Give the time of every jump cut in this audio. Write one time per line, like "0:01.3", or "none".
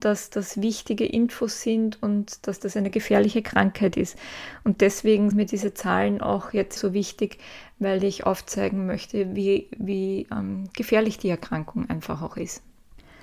0:05.3
0:06.8

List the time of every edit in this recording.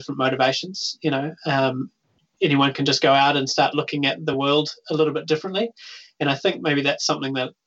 none

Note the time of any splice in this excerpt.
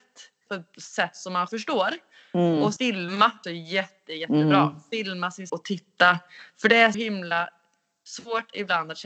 0:01.5
0:02.8
0:03.4
0:05.5
0:06.9

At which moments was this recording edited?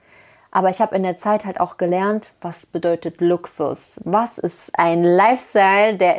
none

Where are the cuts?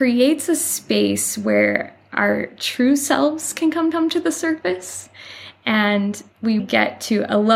0:03.9
0:06.6

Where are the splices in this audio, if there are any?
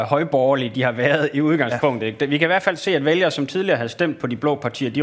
none

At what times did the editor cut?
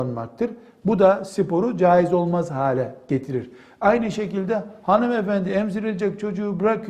none

